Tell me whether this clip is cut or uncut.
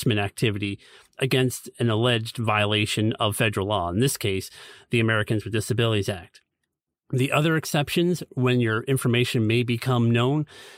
uncut